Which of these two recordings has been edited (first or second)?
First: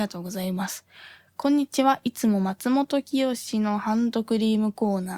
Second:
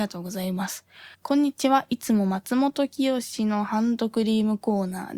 second